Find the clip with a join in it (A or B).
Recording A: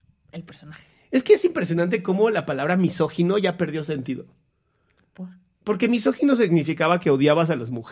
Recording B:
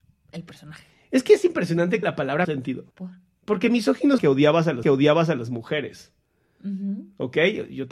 B